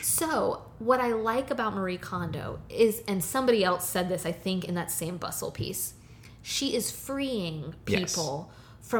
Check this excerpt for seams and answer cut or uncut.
uncut